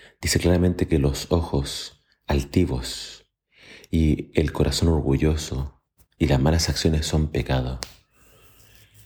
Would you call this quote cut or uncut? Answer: uncut